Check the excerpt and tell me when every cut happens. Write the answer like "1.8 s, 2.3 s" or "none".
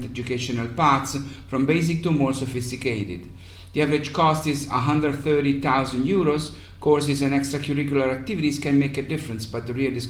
none

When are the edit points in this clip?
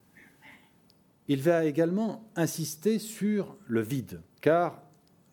4.3 s

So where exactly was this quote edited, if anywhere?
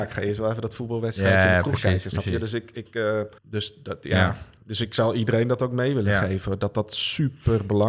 3.4 s

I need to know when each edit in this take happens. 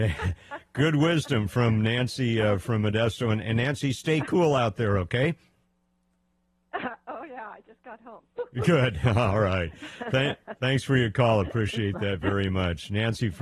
none

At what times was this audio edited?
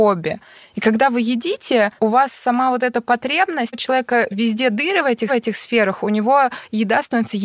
2.0 s, 3.7 s, 5.3 s

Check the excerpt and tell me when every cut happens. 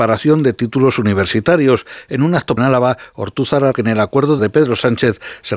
2.6 s, 3.7 s, 4.4 s

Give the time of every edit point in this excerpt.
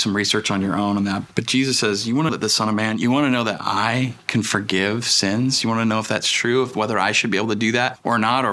2.3 s

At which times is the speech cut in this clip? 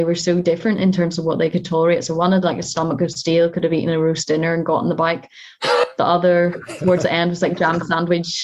none

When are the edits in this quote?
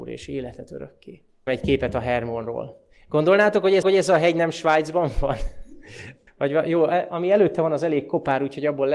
1.5 s, 3.8 s, 6.3 s

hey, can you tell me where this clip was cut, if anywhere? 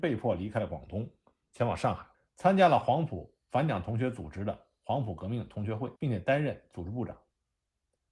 2.1 s, 6.0 s

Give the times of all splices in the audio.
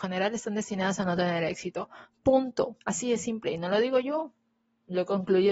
2.8 s

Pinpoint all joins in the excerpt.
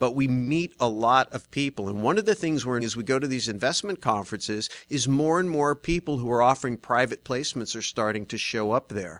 2.8 s

